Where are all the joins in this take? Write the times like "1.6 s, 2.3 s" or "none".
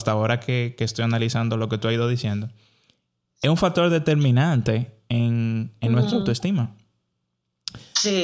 none